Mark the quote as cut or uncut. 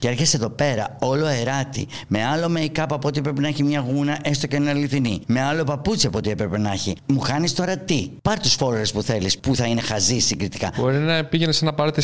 uncut